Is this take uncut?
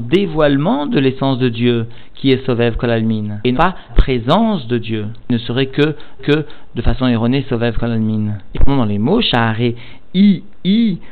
no; 4 cuts; at 3.5 s, 3.9 s, 6.2 s, 8.5 s

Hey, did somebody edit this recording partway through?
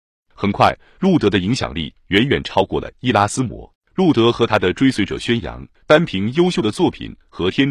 yes; 2 cuts; at 3.8 s, 5.8 s

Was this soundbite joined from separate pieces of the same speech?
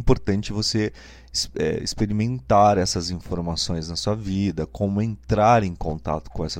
no; 0 cuts

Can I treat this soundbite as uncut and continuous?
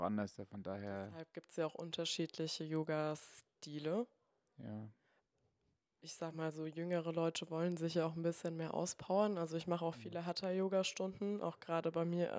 yes; 0 cuts

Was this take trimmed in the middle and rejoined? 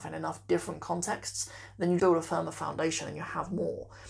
yes; 1 cut; at 2.0 s

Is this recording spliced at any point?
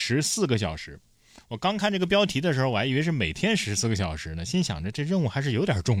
no; 0 cuts

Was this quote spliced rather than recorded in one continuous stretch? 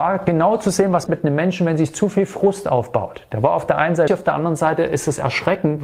yes; 2 cuts; at 1.1 s, 4.1 s

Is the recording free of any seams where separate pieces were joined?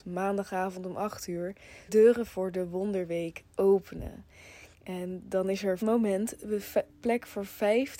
no; 3 cuts; at 1.9 s, 4.7 s, 5.8 s

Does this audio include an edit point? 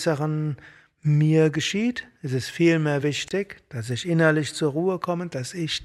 no; 0 cuts

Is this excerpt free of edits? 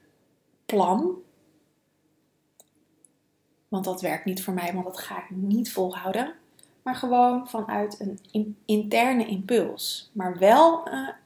yes; 0 cuts

